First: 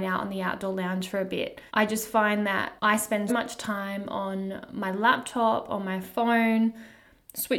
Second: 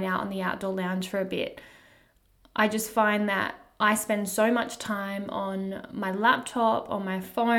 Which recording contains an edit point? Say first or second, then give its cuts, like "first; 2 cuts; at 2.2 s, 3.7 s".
first; 3 cuts; at 1.7 s, 2.8 s, 3.3 s